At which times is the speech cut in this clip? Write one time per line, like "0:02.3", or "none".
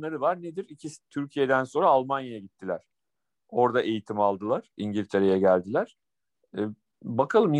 none